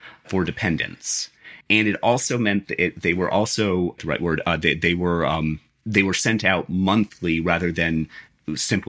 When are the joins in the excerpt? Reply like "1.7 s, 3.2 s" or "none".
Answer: 1.6 s, 4.0 s